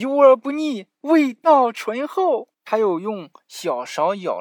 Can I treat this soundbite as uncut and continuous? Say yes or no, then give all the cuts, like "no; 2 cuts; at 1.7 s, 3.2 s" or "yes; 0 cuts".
no; 2 cuts; at 0.9 s, 2.5 s